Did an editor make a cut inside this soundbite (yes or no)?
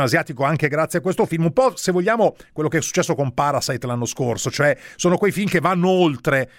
no